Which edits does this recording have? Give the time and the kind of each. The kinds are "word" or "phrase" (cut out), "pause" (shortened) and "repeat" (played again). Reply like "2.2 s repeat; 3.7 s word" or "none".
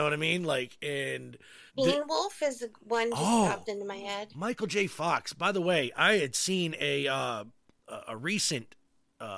1.7 s pause